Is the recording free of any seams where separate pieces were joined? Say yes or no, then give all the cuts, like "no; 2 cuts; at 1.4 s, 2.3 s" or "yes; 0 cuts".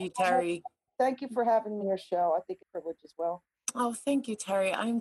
no; 2 cuts; at 1.8 s, 2.6 s